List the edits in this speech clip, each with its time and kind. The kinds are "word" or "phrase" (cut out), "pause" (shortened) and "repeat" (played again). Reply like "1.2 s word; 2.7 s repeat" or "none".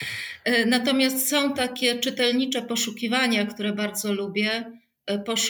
none